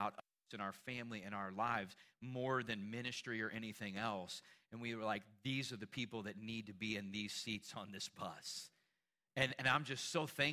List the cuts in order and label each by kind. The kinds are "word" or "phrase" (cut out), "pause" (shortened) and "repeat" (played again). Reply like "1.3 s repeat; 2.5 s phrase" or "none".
none